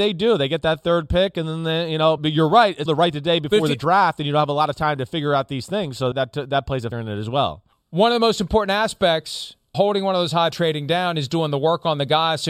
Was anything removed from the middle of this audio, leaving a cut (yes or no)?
yes